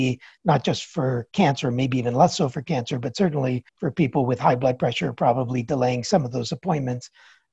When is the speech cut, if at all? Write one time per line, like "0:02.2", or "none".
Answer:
0:03.7